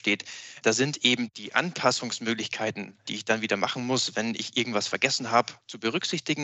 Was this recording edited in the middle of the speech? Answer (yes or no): no